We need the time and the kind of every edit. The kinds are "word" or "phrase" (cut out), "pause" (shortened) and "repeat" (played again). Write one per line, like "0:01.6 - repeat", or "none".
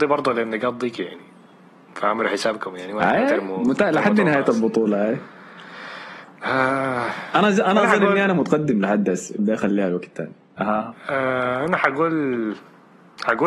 0:09.4 - word